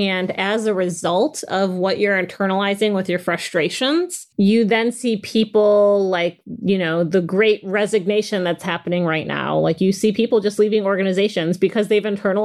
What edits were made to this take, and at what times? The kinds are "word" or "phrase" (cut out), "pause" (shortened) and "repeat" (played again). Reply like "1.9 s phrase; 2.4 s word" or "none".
4.3 s pause